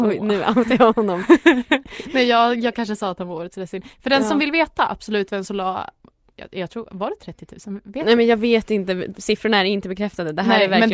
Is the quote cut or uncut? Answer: uncut